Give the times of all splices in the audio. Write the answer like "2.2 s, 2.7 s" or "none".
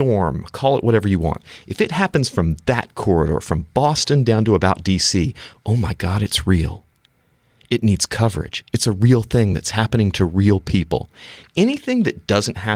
none